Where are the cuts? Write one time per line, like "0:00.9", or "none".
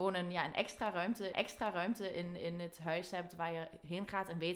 0:01.3